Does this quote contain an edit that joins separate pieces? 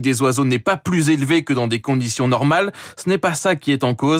no; 0 cuts

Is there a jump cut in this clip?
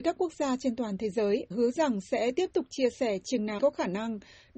yes; 2 cuts; at 1.5 s, 3.6 s

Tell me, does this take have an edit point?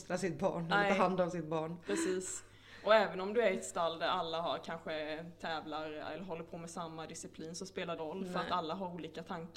yes; 1 cut; at 8.0 s

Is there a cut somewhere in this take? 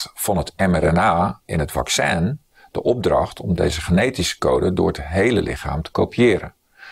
no; 0 cuts

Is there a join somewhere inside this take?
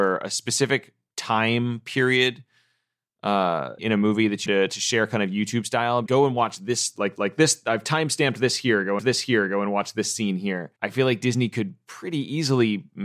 yes; 6 cuts; at 3.8 s, 4.5 s, 6.1 s, 7.2 s, 9.0 s, 10.8 s

